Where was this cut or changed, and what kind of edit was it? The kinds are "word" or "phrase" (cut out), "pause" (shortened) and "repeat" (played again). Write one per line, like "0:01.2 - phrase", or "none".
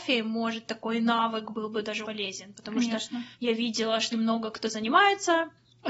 0:02.0 - word
0:03.3 - pause
0:04.1 - word